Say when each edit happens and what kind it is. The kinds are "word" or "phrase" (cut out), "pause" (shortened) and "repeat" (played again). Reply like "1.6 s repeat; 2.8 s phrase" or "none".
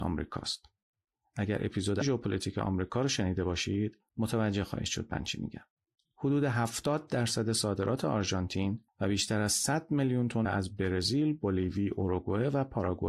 2.0 s word; 10.4 s word